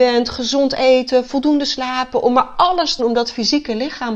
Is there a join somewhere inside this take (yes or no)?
yes